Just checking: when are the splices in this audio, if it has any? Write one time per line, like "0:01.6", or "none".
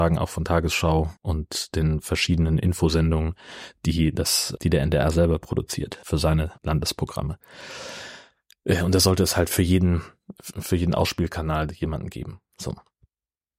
0:01.2
0:04.6
0:06.6